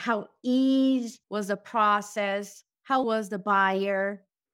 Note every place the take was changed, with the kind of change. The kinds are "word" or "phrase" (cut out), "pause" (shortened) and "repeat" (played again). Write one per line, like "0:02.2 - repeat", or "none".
0:01.2 - pause
0:03.0 - word